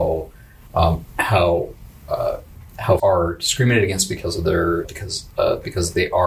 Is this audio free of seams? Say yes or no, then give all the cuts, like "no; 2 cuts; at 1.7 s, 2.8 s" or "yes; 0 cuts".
no; 2 cuts; at 3.0 s, 4.8 s